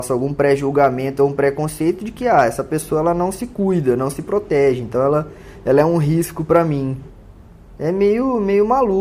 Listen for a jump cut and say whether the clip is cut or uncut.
uncut